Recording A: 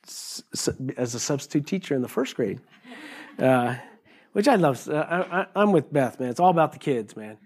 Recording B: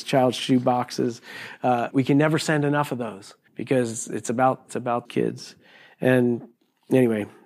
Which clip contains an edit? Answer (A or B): B